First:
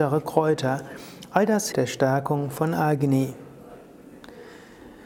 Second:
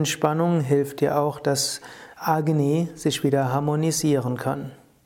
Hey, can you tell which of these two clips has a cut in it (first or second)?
first